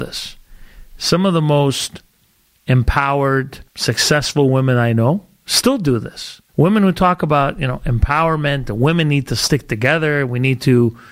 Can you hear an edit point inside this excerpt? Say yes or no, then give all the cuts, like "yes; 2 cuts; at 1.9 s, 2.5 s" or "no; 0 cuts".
yes; 2 cuts; at 3.7 s, 6.5 s